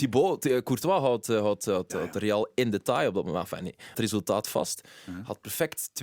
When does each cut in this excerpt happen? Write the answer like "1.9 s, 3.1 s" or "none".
3.9 s